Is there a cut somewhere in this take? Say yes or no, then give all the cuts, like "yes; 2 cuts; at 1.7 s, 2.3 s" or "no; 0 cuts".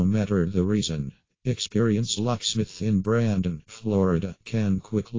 yes; 2 cuts; at 2.2 s, 3.6 s